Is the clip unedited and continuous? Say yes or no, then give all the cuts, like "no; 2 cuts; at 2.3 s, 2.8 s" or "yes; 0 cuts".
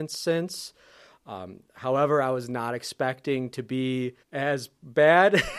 no; 1 cut; at 4.2 s